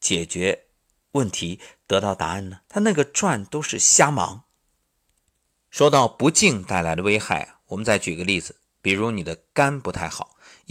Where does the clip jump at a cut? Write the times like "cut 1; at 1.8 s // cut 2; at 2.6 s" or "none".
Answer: cut 1; at 2.6 s